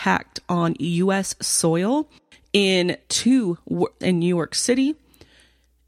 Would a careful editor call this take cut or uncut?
cut